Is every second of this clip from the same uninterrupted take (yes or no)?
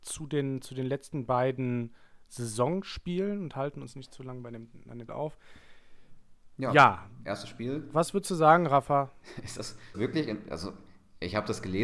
no